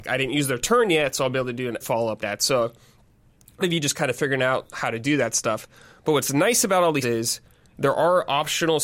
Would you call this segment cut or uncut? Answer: cut